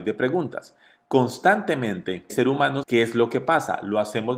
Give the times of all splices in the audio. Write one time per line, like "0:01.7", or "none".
0:02.3
0:02.8